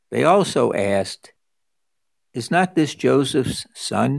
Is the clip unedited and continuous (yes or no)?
yes